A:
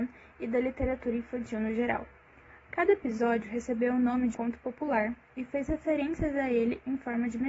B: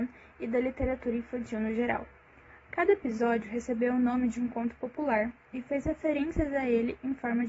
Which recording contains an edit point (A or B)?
A